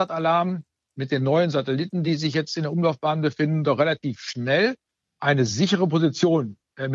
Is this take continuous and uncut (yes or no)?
yes